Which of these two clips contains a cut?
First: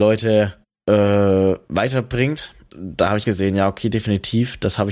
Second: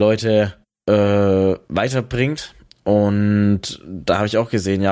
first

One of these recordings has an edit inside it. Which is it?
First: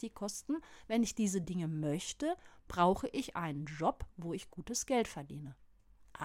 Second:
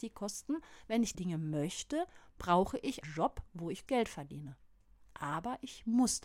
second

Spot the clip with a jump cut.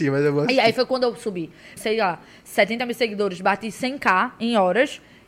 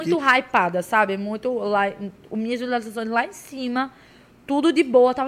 first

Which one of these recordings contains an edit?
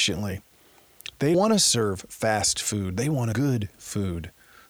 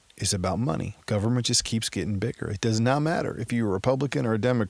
first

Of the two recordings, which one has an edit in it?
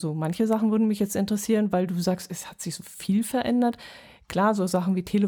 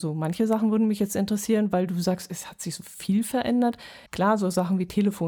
second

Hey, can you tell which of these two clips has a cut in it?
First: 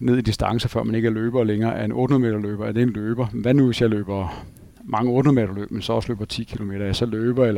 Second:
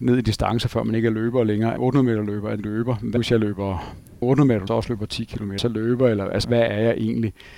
second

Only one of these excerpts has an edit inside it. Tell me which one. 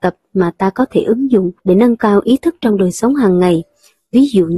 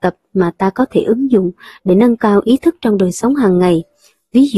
first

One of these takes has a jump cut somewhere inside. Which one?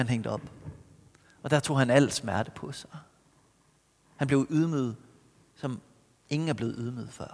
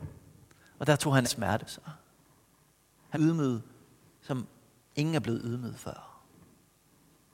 second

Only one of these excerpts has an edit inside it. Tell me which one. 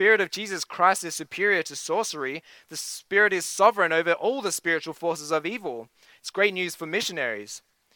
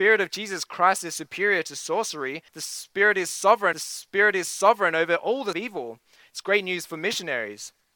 second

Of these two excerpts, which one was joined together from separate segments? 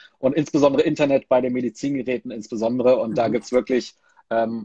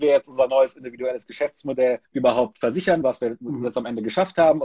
second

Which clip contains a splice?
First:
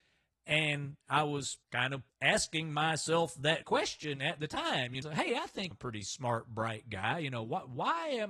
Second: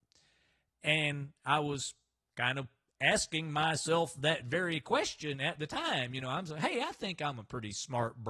first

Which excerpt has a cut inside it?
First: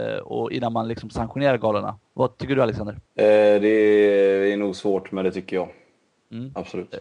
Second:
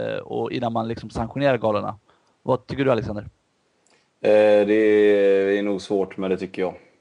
first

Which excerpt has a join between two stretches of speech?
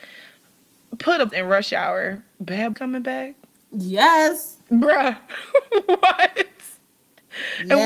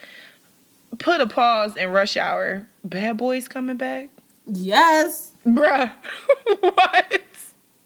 first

